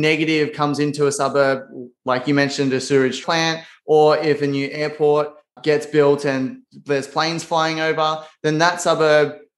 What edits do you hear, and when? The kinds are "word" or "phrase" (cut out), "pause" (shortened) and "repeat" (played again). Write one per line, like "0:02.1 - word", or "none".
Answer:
0:03.2 - word
0:05.6 - word